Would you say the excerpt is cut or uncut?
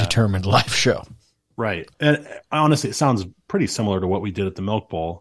cut